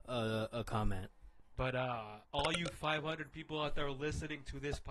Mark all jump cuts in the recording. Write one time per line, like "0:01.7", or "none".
0:02.2